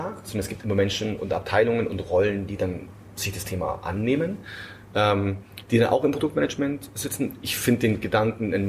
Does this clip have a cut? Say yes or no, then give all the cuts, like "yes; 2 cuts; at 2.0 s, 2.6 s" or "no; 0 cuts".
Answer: no; 0 cuts